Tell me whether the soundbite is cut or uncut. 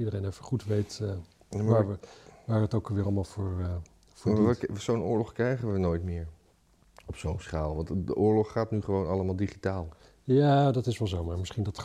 uncut